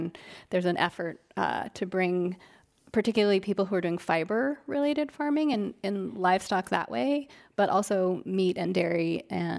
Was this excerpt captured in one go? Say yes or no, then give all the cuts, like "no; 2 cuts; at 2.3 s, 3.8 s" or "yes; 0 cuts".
yes; 0 cuts